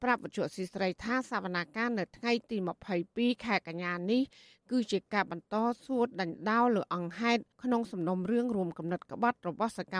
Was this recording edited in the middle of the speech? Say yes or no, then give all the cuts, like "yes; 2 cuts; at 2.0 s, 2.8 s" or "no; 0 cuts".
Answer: yes; 1 cut; at 7.5 s